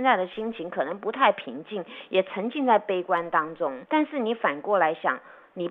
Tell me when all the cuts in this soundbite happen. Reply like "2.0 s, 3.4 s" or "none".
3.8 s